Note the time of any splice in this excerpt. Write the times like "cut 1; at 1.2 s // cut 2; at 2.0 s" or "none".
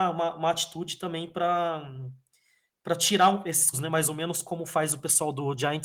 cut 1; at 3.7 s